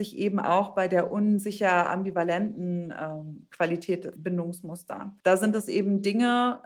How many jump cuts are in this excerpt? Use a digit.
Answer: 2